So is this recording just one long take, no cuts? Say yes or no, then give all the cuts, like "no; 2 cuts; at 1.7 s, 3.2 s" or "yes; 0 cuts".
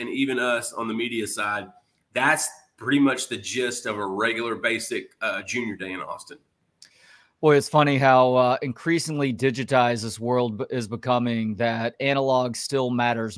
yes; 0 cuts